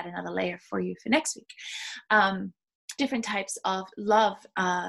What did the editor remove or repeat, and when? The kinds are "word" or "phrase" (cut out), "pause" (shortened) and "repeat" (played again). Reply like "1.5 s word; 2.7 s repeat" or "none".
3.0 s phrase

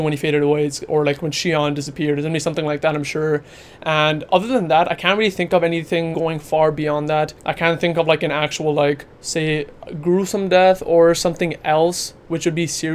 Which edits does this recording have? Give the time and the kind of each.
6.1 s word; 7.4 s pause; 9.1 s pause

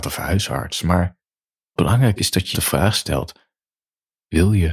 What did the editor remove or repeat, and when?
1.8 s word; 2.2 s word; 2.5 s word

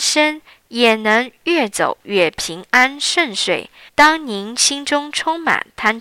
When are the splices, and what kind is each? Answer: 3.9 s pause

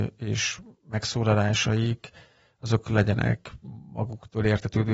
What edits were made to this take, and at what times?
none

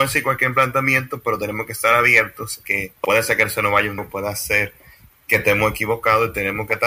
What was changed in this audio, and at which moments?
2.6 s word; 4.0 s word

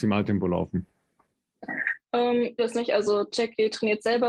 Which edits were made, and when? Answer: 2.6 s word

